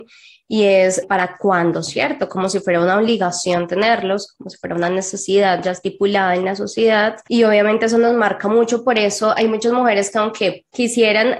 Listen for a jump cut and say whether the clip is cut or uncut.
cut